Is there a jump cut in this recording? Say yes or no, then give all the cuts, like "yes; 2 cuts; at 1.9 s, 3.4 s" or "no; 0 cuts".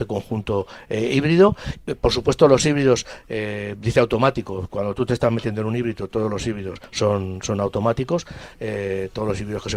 yes; 1 cut; at 6.9 s